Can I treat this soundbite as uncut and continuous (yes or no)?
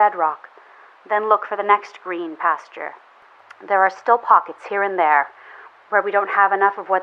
yes